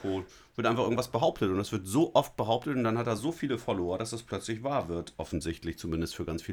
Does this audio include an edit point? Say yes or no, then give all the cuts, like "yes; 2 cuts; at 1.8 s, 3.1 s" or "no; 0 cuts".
no; 0 cuts